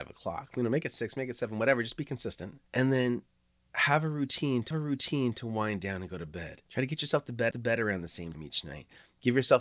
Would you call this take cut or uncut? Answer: cut